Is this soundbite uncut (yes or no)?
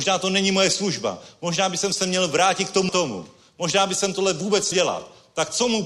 no